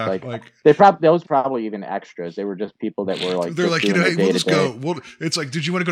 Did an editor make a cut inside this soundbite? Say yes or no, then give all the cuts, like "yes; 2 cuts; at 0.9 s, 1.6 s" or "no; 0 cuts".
yes; 1 cut; at 1.2 s